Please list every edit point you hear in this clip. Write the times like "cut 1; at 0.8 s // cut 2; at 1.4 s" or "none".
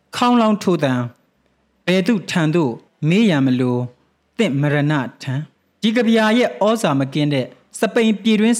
cut 1; at 2.9 s // cut 2; at 5.6 s